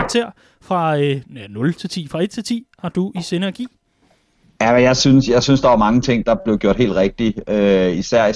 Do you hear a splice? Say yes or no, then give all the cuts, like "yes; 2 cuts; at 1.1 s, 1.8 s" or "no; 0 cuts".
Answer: no; 0 cuts